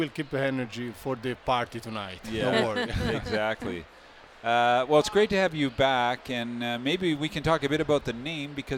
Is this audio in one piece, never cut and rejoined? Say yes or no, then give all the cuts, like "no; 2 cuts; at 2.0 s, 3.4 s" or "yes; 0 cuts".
yes; 0 cuts